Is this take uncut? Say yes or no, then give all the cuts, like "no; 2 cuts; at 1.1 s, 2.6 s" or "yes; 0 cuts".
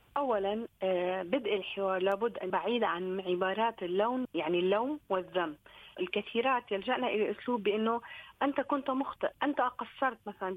no; 3 cuts; at 2.5 s, 4.2 s, 6.0 s